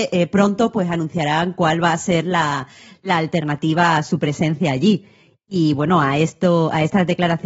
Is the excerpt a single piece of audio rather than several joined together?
yes; 0 cuts

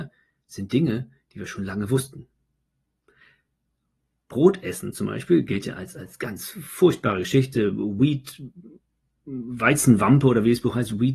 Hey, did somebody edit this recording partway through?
no; 0 cuts

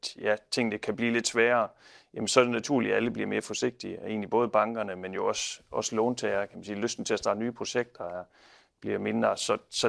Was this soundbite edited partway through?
no; 0 cuts

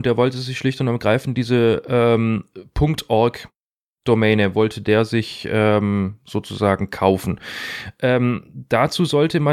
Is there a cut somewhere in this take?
no; 0 cuts

